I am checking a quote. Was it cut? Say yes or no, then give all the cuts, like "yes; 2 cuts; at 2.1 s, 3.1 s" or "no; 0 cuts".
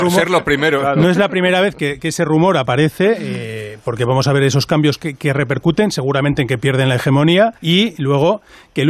yes; 1 cut; at 7.6 s